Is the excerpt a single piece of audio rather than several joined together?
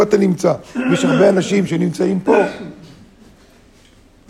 yes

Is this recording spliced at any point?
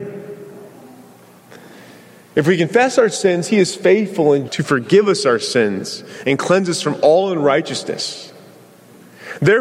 yes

